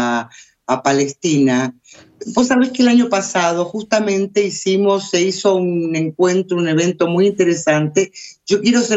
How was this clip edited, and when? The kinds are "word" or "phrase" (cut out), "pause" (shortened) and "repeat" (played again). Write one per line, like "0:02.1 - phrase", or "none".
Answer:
none